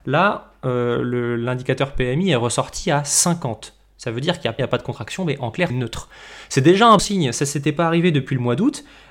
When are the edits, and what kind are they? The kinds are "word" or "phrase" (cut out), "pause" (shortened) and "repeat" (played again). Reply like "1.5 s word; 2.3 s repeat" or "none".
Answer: 4.6 s phrase; 5.7 s word; 7.0 s word